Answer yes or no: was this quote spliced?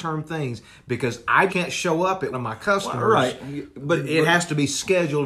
yes